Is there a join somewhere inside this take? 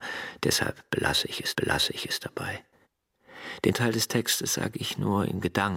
yes; 2 cuts; at 1.5 s, 3.7 s

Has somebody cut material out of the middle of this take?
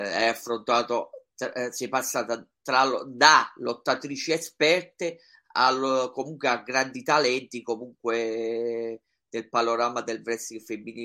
no; 0 cuts

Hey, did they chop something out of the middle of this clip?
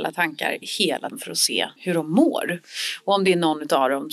yes; 2 cuts; at 1.1 s, 1.8 s

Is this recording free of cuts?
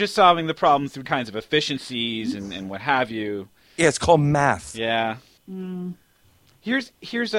no; 1 cut; at 1.0 s

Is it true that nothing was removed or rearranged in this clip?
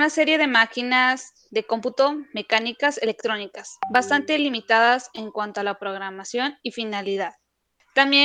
yes; 0 cuts

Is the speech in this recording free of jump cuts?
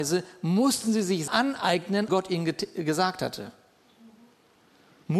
no; 2 cuts; at 1.3 s, 2.1 s

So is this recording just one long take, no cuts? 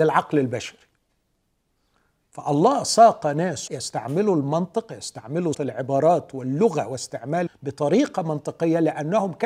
no; 3 cuts; at 3.7 s, 5.5 s, 7.5 s

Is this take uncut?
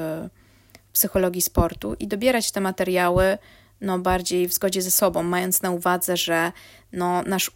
yes; 0 cuts

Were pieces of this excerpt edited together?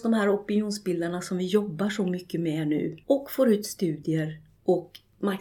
yes; 1 cut; at 3.0 s

